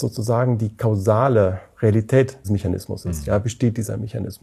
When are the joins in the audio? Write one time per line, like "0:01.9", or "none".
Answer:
0:02.4
0:03.4